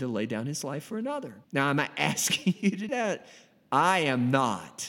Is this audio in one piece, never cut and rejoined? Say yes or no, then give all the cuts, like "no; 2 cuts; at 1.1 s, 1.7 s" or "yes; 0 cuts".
no; 2 cuts; at 1.4 s, 2.9 s